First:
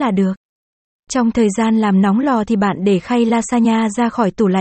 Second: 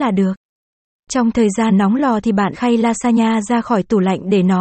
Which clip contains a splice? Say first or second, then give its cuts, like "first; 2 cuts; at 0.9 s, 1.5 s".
second; 2 cuts; at 1.7 s, 2.5 s